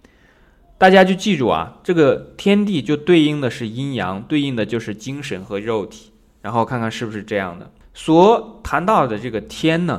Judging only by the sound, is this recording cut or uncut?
cut